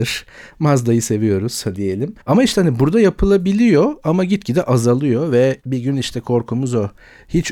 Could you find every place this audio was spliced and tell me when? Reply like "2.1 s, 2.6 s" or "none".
2.2 s, 5.6 s